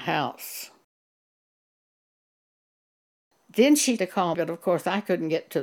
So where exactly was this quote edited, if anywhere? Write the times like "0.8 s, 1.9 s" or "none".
4.0 s, 4.3 s